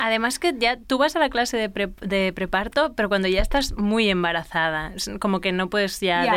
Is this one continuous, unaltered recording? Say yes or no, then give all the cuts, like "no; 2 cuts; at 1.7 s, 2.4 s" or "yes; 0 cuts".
yes; 0 cuts